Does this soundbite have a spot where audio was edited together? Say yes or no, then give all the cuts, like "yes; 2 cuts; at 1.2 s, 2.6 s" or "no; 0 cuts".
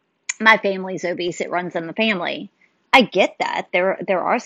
no; 0 cuts